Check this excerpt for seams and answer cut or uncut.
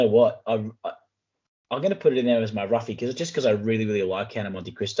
uncut